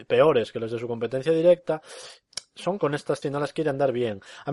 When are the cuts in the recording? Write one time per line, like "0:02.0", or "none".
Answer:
0:02.8
0:03.2